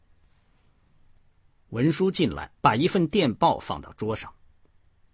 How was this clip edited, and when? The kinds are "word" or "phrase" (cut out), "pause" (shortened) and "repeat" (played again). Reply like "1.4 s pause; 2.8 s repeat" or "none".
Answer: 2.6 s pause